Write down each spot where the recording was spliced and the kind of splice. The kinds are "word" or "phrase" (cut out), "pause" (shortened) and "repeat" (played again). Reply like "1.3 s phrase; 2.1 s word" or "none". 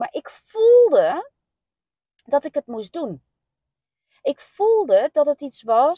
none

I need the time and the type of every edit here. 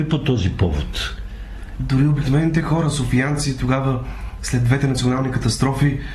none

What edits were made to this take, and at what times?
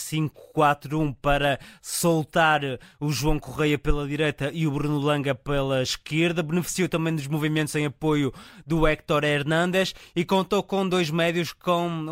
none

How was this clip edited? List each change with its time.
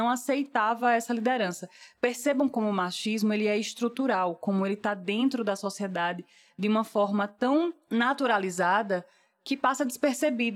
none

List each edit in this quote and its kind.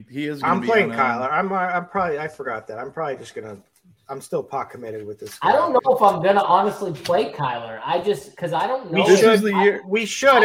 none

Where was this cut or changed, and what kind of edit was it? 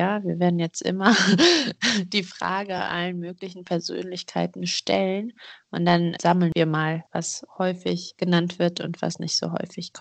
none

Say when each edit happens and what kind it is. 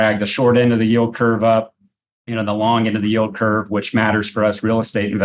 none

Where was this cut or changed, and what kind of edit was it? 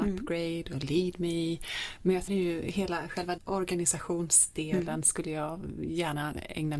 2.3 s phrase; 3.4 s word

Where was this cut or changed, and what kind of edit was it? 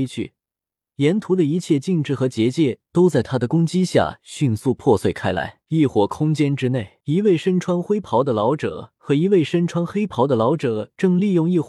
5.6 s pause; 7.0 s pause

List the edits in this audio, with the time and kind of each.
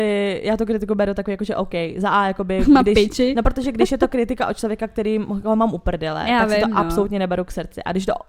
none

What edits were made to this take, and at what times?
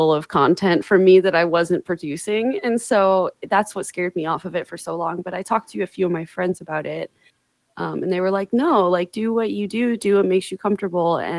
none

